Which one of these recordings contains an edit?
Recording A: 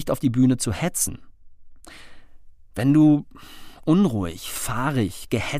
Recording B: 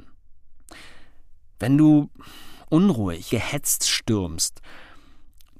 B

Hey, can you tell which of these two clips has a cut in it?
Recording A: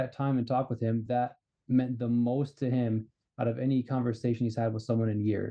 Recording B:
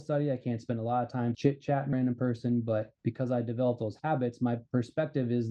B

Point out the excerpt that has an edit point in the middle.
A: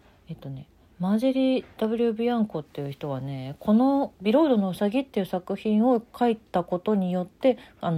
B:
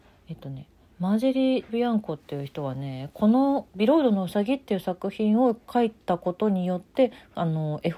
B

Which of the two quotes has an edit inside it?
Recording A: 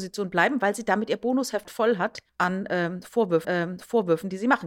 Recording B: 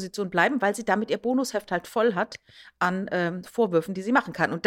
A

